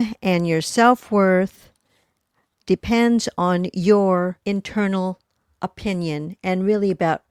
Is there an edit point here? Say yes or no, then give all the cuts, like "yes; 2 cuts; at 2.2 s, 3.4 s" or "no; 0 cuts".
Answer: yes; 1 cut; at 4.4 s